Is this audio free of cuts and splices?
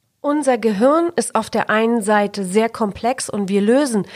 yes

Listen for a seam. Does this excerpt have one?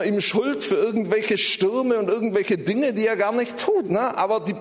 no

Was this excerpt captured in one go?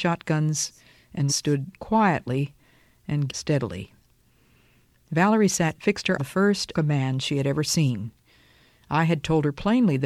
no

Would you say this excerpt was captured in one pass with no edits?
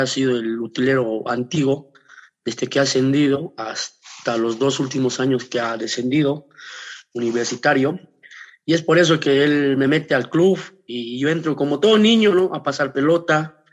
yes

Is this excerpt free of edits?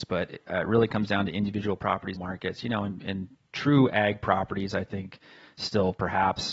no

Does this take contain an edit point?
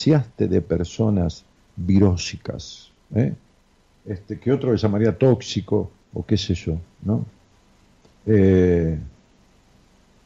yes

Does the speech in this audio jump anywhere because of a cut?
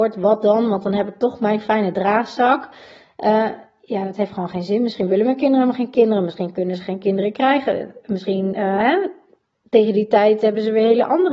no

